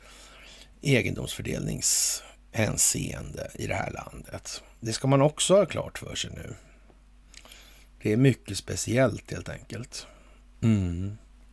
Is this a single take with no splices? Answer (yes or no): yes